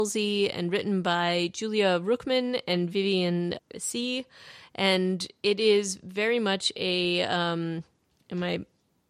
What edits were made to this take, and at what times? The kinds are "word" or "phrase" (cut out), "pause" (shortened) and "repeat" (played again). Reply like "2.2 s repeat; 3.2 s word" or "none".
3.6 s word

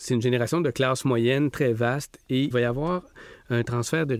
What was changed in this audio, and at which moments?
1.5 s word; 2.5 s word

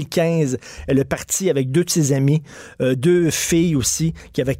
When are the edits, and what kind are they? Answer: none

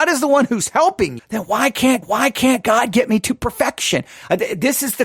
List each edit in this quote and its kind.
1.2 s word; 2.0 s repeat

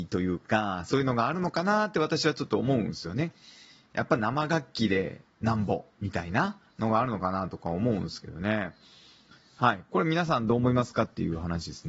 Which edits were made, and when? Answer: 6.7 s pause

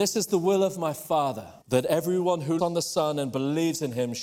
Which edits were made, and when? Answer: 1.6 s pause; 2.6 s word

